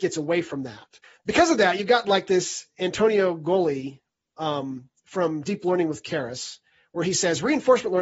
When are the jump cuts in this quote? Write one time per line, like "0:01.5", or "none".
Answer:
none